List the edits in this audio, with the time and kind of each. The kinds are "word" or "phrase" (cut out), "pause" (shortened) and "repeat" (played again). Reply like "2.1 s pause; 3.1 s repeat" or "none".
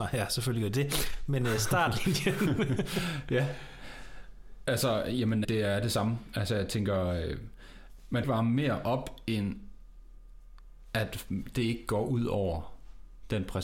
5.4 s word; 8.2 s phrase